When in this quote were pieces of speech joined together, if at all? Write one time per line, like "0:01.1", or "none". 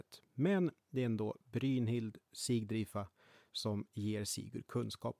0:02.2